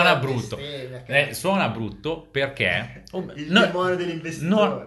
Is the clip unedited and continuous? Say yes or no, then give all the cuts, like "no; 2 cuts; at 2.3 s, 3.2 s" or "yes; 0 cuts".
yes; 0 cuts